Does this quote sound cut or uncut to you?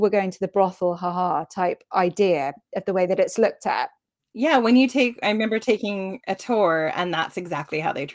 uncut